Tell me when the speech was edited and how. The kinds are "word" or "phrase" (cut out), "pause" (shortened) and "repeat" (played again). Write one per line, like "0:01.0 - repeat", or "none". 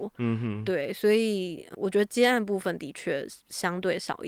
0:01.7 - word